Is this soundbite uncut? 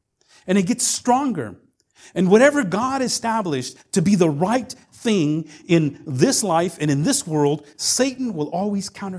yes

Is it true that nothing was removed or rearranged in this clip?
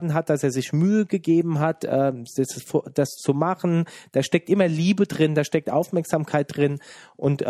yes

